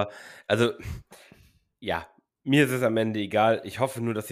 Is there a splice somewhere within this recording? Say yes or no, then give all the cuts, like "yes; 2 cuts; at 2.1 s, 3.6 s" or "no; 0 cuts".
no; 0 cuts